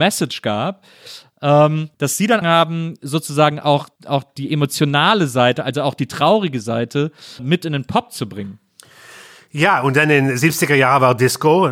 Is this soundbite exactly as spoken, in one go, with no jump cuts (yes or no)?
no